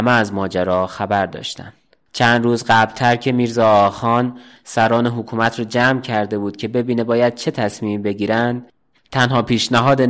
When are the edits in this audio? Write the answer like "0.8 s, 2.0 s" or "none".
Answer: none